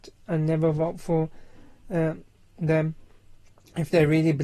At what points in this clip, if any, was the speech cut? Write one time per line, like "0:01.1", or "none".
none